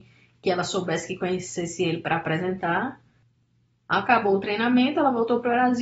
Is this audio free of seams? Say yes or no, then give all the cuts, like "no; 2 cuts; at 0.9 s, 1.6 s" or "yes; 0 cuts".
yes; 0 cuts